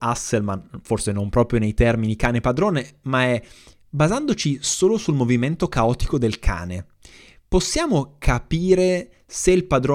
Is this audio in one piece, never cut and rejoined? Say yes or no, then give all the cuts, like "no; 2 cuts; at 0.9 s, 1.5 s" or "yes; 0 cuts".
yes; 0 cuts